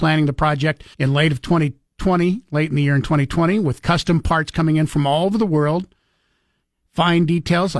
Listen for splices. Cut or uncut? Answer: cut